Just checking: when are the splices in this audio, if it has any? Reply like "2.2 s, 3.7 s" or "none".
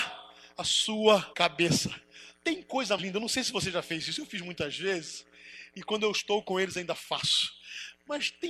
1.3 s, 3.0 s